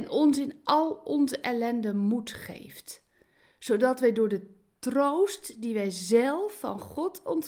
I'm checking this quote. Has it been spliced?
no; 0 cuts

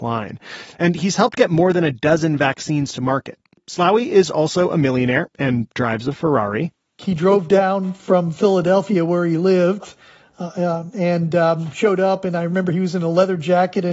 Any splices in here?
no; 0 cuts

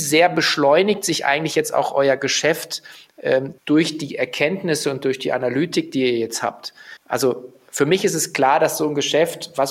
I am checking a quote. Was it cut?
yes; 2 cuts; at 3.6 s, 7.0 s

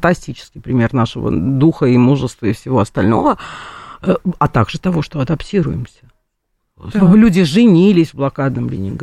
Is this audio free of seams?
yes; 0 cuts

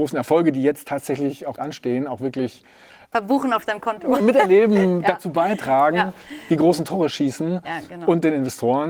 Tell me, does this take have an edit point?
yes; 3 cuts; at 1.6 s, 3.1 s, 4.2 s

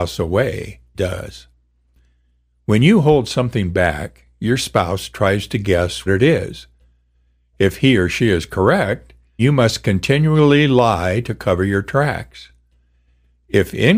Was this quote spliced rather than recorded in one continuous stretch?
yes; 3 cuts; at 0.9 s, 6.1 s, 9.4 s

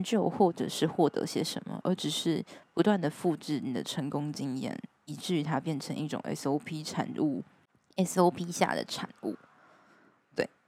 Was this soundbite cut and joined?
no; 0 cuts

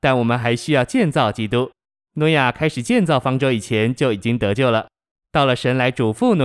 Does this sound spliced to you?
no; 0 cuts

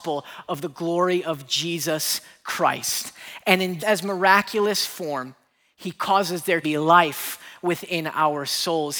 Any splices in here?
yes; 2 cuts; at 3.8 s, 6.6 s

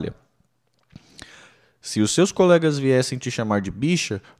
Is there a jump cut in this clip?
no; 0 cuts

